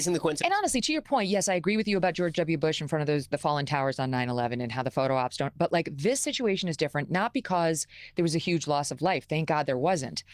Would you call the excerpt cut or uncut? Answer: uncut